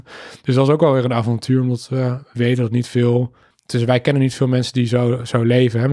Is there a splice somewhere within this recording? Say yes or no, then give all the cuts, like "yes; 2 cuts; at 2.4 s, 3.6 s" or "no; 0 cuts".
no; 0 cuts